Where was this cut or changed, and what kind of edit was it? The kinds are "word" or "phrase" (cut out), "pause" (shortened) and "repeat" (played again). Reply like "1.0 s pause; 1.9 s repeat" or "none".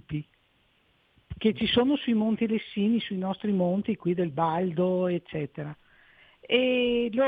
none

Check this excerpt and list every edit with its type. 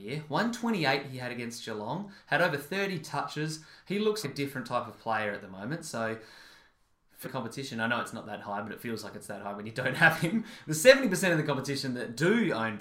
4.2 s word; 7.2 s phrase

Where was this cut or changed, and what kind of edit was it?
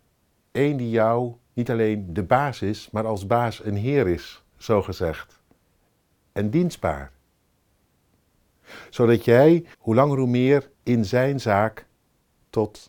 1.4 s pause; 9.7 s pause; 10.7 s pause

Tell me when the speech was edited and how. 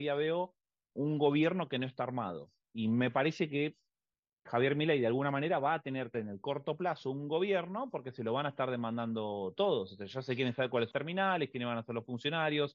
0.9 s word; 4.5 s word; 6.1 s word; 10.9 s word

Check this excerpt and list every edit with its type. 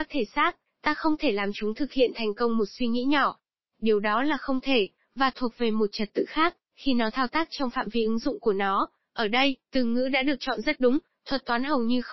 6.6 s pause

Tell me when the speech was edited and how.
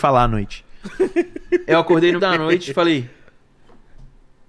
2.2 s word

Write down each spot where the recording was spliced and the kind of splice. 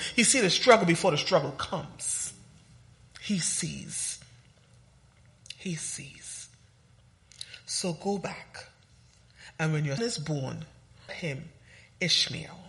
10.0 s word; 11.1 s word

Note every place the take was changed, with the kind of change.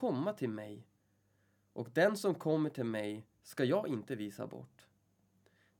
none

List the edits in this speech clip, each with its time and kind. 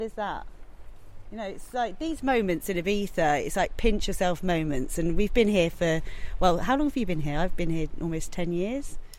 none

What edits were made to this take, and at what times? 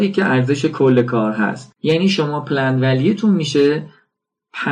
1.8 s pause

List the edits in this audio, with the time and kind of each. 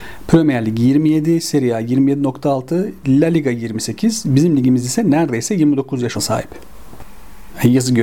6.1 s word

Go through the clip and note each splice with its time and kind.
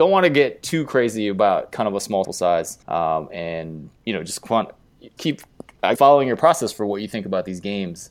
2.2 s word; 2.8 s pause; 4.0 s pause; 5.2 s word; 5.9 s word

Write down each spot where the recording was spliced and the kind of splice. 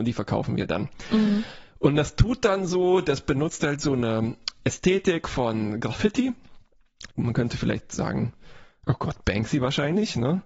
7.1 s pause

